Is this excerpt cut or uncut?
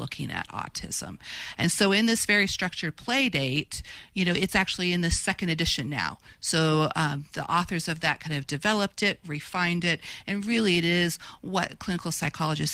uncut